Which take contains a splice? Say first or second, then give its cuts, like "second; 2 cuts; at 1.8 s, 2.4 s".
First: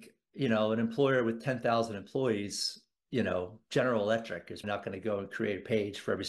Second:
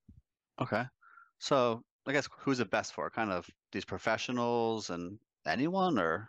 first; 1 cut; at 4.6 s